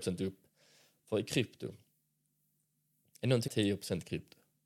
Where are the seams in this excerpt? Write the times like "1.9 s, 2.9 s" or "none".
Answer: 3.5 s